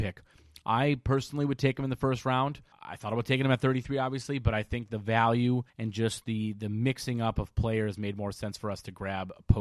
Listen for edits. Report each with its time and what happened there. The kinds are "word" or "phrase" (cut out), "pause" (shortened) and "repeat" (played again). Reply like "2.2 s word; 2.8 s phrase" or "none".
2.7 s pause; 5.7 s pause